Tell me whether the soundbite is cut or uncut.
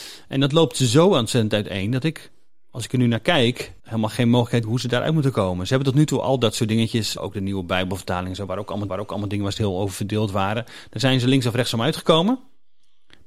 cut